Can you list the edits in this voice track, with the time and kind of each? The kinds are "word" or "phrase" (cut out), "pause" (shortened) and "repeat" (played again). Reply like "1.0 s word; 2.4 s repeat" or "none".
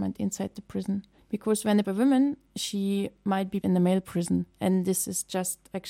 1.2 s pause; 1.8 s phrase; 2.5 s word; 3.6 s word